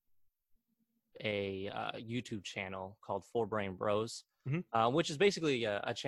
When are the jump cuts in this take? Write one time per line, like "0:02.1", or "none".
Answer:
none